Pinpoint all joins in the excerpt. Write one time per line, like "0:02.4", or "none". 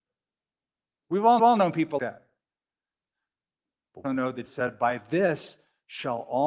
0:01.4
0:02.0
0:04.0
0:04.5

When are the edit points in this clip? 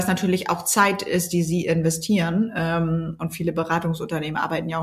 none

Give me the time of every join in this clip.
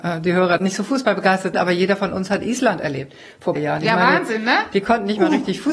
0:01.5
0:03.6

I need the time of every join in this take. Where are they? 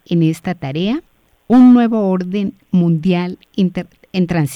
0:01.3

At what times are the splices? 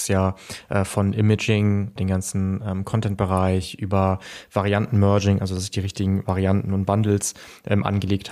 0:02.0

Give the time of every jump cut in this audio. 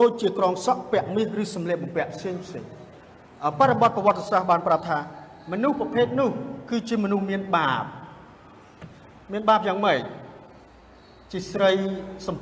none

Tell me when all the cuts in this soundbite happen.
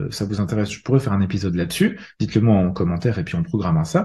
none

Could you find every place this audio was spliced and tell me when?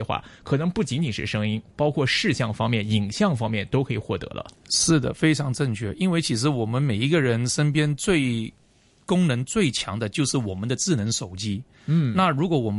none

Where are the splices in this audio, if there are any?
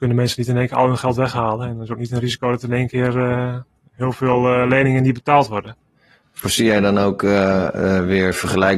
none

